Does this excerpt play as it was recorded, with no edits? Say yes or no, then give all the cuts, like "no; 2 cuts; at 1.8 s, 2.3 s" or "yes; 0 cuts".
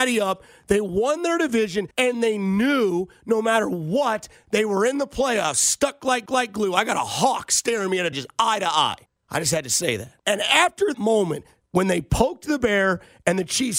no; 6 cuts; at 1.9 s, 6.3 s, 8.1 s, 9.1 s, 10.2 s, 10.9 s